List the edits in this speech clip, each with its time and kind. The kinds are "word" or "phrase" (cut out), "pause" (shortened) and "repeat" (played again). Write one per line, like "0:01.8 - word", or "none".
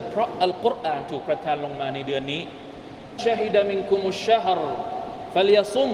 0:03.2 - word